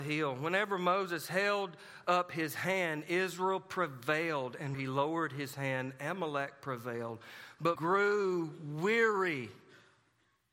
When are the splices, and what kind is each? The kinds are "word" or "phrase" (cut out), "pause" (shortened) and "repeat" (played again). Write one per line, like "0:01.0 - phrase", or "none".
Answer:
0:04.7 - word
0:07.8 - phrase